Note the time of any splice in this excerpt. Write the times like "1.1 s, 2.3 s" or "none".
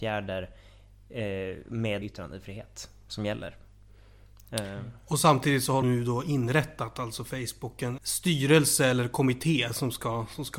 2.0 s, 5.8 s, 8.0 s